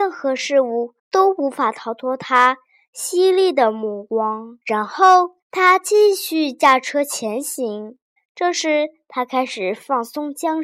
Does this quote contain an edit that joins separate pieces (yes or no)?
yes